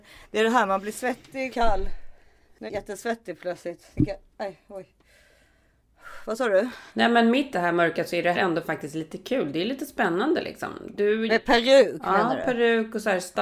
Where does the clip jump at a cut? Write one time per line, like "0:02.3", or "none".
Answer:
0:01.5
0:02.7
0:06.9
0:07.5
0:08.3
0:11.3